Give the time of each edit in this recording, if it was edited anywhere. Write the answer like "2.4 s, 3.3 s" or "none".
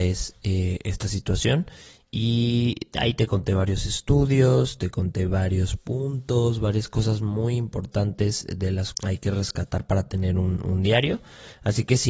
8.9 s